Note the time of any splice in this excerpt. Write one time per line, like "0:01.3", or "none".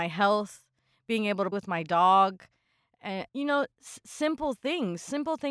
0:01.5
0:03.3